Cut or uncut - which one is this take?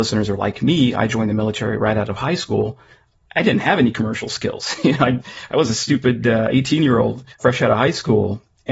cut